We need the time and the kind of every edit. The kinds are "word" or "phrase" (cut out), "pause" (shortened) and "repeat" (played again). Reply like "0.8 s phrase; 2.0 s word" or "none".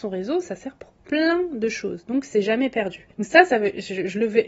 3.1 s pause